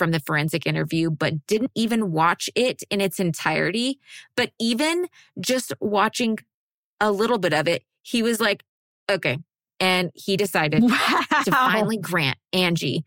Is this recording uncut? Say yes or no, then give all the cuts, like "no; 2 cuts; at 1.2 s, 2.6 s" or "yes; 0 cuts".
yes; 0 cuts